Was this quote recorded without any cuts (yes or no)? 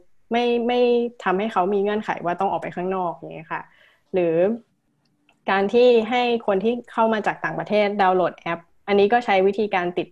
yes